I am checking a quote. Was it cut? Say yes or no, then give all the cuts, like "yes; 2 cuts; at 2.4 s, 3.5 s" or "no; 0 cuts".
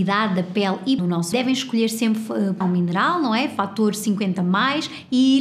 yes; 3 cuts; at 1.0 s, 1.3 s, 2.6 s